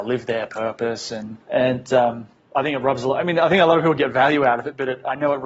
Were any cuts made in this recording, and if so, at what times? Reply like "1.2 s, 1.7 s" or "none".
none